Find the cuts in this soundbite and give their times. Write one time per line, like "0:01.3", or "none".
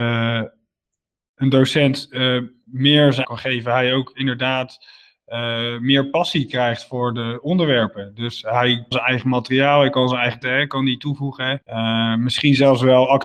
0:03.2
0:08.9
0:10.4
0:11.6